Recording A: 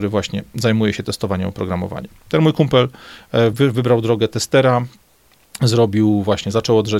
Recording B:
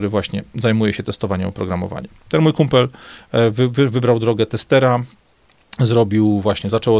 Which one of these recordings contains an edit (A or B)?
A